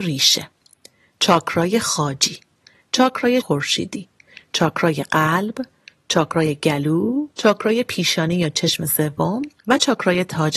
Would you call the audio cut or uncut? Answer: cut